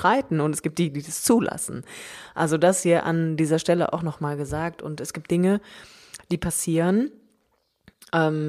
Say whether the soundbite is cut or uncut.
uncut